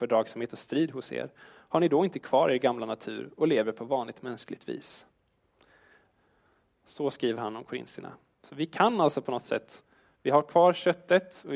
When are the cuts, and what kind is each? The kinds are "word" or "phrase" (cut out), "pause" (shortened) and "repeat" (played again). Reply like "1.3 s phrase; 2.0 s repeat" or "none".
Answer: none